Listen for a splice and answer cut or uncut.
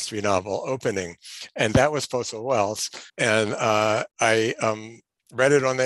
cut